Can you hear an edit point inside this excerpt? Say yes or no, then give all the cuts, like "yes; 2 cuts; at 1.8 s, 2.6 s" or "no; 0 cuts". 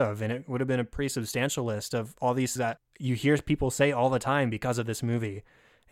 yes; 1 cut; at 2.6 s